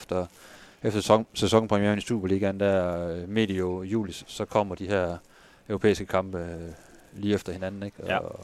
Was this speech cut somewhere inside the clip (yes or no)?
no